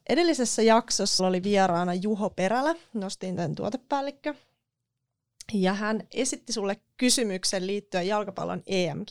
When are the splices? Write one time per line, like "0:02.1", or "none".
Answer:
0:01.2